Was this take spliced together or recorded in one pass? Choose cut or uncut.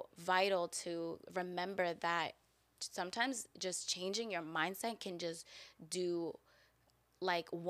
uncut